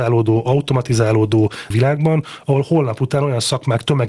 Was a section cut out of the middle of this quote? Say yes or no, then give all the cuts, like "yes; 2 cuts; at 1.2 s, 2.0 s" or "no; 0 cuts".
yes; 1 cut; at 1.7 s